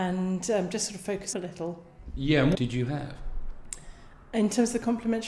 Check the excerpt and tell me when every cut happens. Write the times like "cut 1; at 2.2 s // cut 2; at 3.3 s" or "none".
cut 1; at 1.3 s // cut 2; at 2.5 s